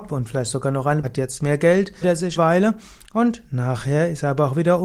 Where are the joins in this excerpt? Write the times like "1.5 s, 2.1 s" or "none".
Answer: 1.0 s, 2.0 s, 2.4 s